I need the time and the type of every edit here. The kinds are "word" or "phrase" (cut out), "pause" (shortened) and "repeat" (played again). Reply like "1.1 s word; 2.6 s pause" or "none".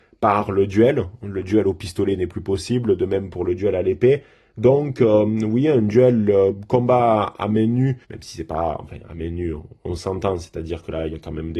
8.0 s pause